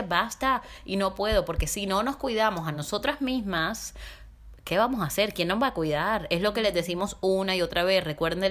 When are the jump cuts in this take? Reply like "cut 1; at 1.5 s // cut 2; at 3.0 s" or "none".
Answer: none